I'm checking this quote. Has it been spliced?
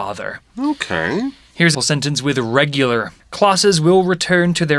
yes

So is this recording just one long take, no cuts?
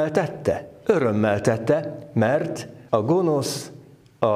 no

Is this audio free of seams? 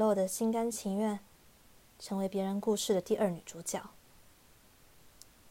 yes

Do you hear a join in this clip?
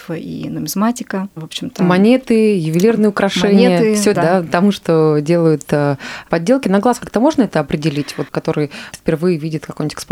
yes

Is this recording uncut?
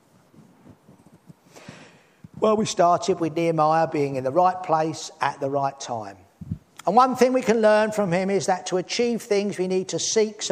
yes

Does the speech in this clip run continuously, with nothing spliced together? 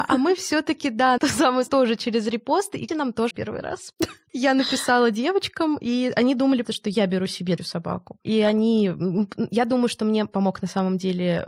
no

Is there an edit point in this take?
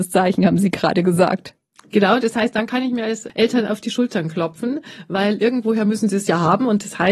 no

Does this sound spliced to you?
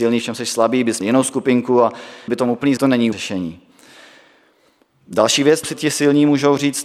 yes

